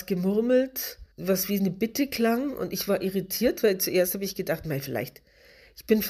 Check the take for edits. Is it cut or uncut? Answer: cut